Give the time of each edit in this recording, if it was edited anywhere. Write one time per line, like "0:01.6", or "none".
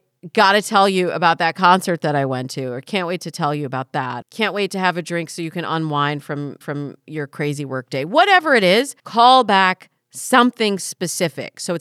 0:04.2
0:06.6
0:09.0

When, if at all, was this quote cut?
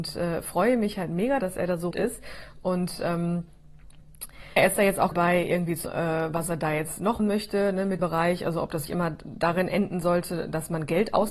0:01.4
0:01.9
0:04.6
0:05.1
0:05.8
0:07.2
0:08.0
0:08.9

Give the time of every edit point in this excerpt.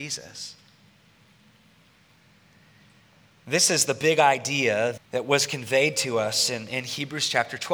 0:05.0

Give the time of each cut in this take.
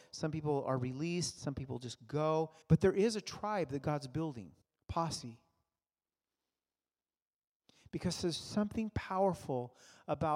0:02.6
0:04.6

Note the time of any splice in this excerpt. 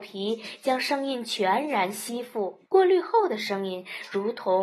0:02.7

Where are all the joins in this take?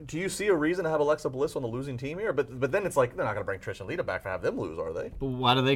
none

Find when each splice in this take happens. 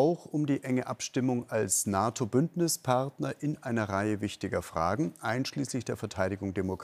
none

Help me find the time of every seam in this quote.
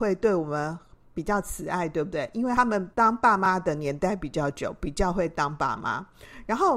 0:02.9

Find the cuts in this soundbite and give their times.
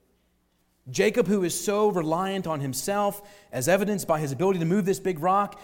none

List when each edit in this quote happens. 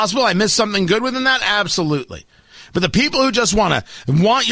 none

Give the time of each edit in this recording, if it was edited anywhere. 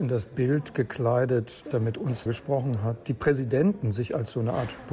0:01.7
0:02.3
0:03.0

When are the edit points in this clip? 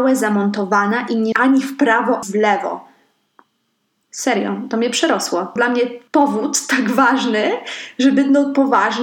0:01.3
0:02.2
0:05.6
0:06.1

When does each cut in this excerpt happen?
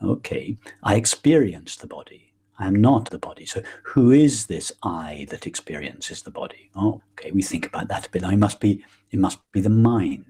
0:02.4
0:03.1
0:07.0

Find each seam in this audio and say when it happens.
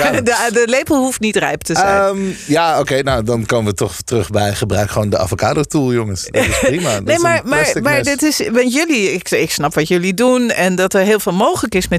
none

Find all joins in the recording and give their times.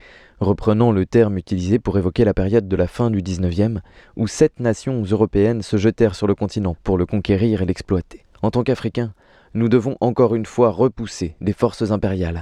none

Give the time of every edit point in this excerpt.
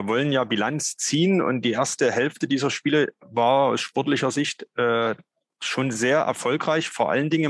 none

